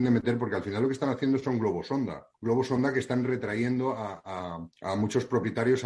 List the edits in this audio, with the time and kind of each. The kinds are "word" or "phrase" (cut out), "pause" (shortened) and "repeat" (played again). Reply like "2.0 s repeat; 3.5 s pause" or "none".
2.3 s pause; 4.7 s pause